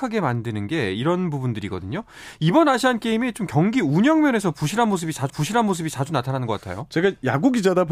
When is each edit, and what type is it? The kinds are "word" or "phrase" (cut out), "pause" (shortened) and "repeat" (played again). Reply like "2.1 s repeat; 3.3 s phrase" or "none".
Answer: 5.3 s repeat